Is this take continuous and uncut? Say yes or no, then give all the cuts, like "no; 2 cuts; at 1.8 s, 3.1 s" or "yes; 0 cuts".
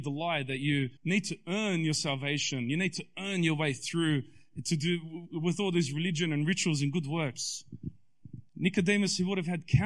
no; 2 cuts; at 1.0 s, 8.5 s